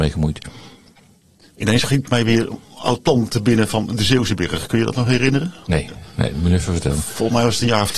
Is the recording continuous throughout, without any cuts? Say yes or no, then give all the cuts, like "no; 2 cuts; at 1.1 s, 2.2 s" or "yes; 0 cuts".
yes; 0 cuts